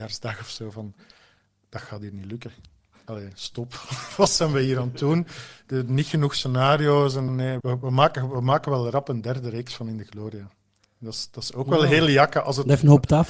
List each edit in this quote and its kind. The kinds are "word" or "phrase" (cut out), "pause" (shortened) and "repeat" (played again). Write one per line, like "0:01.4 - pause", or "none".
0:07.3 - phrase
0:07.6 - word